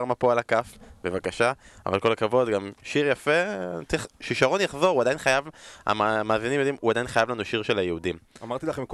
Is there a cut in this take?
no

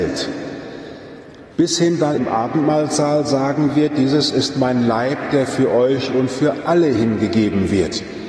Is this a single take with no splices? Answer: no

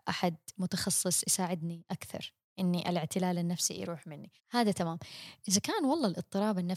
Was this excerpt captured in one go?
no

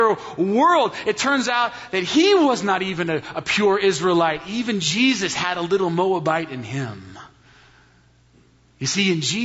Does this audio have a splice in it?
no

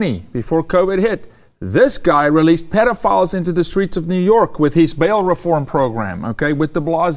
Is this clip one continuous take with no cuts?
yes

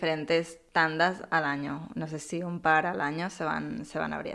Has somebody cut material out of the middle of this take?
no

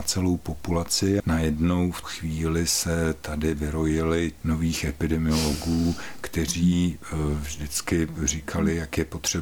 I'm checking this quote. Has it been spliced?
yes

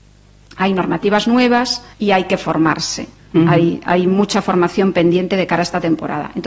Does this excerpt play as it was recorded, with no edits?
no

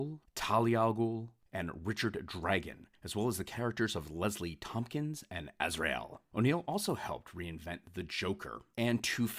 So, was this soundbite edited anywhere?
no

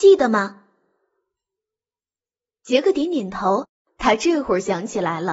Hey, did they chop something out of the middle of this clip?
no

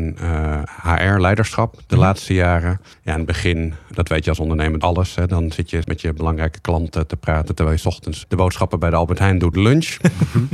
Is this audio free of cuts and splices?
no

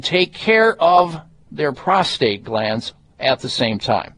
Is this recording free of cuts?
yes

